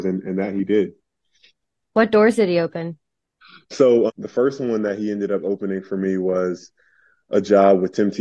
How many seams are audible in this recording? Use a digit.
1